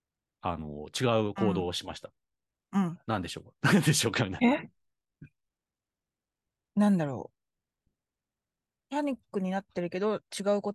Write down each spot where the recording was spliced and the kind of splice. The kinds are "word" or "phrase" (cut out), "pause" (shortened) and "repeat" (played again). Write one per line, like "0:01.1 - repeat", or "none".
0:03.0 - pause